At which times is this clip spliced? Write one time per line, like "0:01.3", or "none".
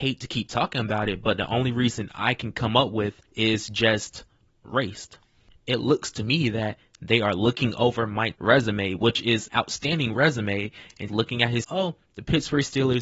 0:03.3
0:05.5
0:08.3
0:09.5
0:11.1
0:11.6